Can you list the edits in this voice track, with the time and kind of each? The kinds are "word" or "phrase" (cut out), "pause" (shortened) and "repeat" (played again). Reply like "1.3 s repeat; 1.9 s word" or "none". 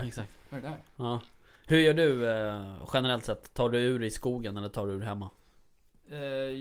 none